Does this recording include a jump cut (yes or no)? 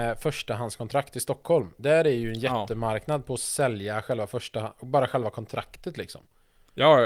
no